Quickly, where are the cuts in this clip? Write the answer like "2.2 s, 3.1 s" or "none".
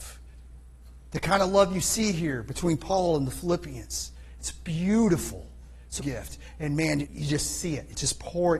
6.0 s, 7.0 s

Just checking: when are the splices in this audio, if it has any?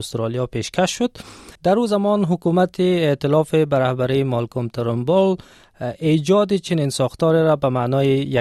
1.5 s

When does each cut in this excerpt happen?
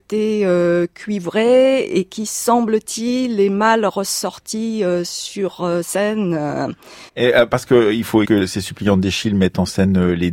7.1 s, 8.2 s

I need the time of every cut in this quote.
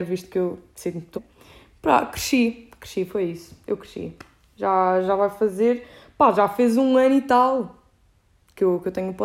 1.1 s

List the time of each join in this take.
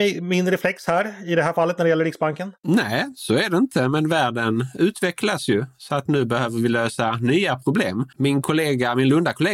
2.6 s, 8.1 s

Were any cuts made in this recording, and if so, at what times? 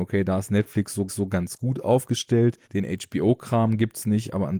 1.1 s, 2.6 s

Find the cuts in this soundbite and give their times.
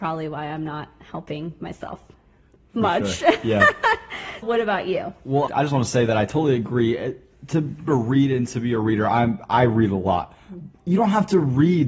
4.4 s, 5.5 s, 7.9 s, 10.7 s

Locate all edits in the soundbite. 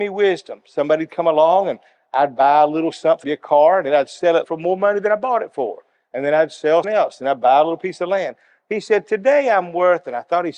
3.2 s, 4.4 s, 6.8 s

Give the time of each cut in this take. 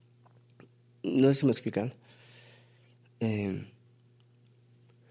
1.5 s

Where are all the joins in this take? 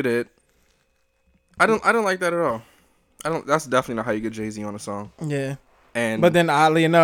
none

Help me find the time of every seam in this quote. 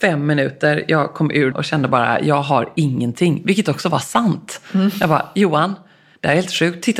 1.5 s

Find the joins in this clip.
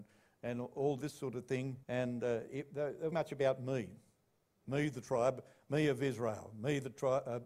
1.8 s, 3.1 s

